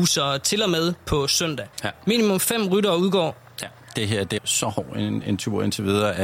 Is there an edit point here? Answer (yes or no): yes